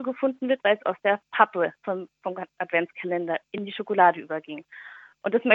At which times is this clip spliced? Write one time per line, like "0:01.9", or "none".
0:01.7